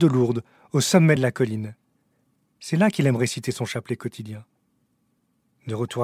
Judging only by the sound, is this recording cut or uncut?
uncut